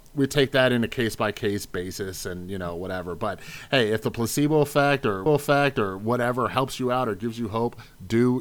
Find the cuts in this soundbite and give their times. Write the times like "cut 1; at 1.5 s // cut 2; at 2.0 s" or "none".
cut 1; at 5.3 s